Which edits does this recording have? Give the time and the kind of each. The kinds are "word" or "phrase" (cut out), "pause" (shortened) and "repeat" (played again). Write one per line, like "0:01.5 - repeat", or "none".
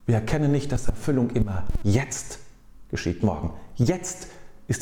0:03.2 - word